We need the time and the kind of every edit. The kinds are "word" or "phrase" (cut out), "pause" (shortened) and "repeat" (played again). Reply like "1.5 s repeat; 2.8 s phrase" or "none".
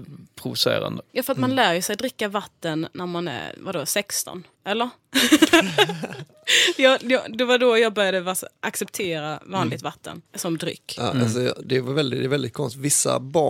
1.1 s pause; 4.5 s pause; 10.3 s pause